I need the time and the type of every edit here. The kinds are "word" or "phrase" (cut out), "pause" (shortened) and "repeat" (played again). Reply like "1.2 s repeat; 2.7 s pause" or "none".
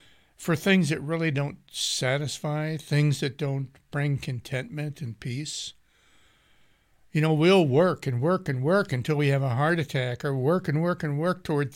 none